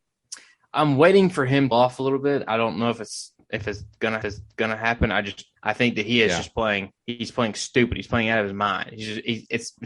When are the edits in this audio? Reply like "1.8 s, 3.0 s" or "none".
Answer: 1.7 s, 4.2 s, 5.6 s, 7.0 s

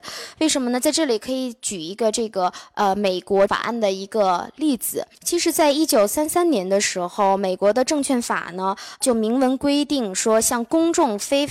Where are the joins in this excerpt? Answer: 3.5 s, 5.1 s

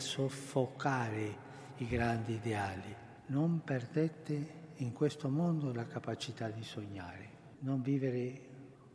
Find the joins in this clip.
3.2 s, 7.5 s

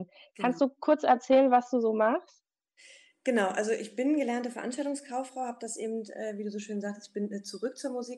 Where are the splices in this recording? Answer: none

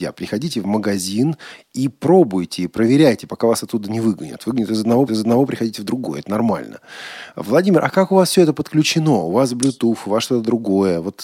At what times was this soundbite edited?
5.1 s

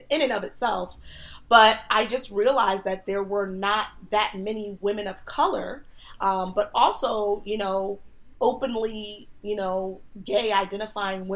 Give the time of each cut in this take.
none

